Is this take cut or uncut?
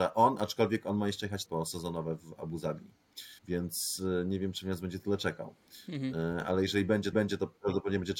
cut